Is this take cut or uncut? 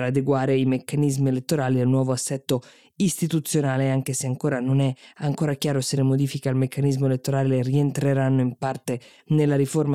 uncut